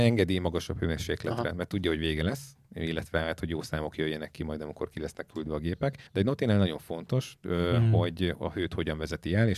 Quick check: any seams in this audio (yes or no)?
yes